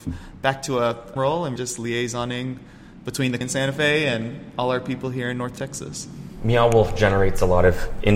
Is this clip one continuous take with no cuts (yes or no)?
no